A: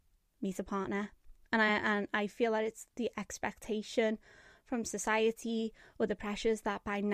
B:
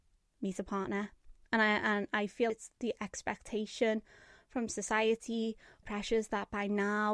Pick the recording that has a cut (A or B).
B